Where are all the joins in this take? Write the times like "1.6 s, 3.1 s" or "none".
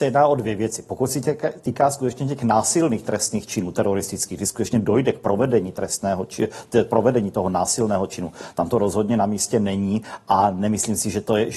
none